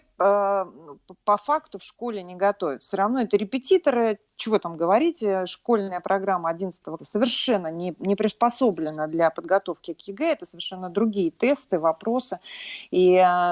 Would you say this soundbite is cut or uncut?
cut